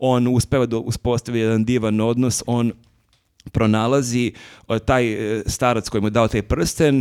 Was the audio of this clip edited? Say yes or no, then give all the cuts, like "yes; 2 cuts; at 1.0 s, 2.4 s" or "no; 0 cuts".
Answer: no; 0 cuts